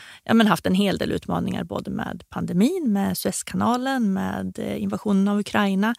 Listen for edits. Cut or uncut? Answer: uncut